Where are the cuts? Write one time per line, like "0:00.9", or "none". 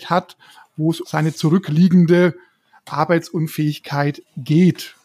0:01.0

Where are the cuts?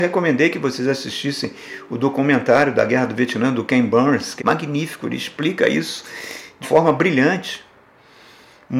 0:04.4
0:06.6

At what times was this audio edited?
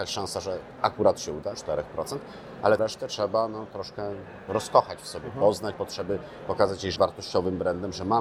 0:01.5
0:02.8
0:05.7
0:07.0

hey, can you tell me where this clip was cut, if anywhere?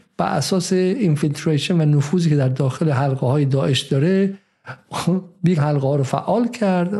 0:05.6

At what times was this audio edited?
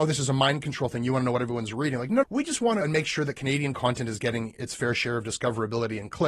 0:02.2
0:02.8

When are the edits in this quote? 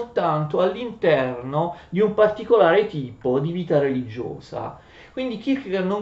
none

